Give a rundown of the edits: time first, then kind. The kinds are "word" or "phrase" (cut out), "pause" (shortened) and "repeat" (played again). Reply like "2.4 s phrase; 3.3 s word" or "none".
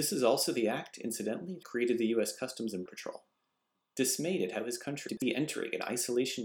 1.6 s word; 2.9 s word; 5.1 s word